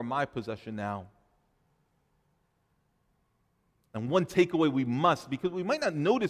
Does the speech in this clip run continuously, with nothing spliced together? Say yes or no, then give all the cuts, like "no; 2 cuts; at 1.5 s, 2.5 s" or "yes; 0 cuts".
yes; 0 cuts